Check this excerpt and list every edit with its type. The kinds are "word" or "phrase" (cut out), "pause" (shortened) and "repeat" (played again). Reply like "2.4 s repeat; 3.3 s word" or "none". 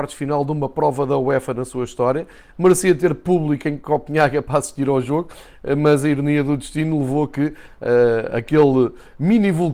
none